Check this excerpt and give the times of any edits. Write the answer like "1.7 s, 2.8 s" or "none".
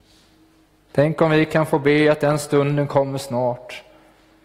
none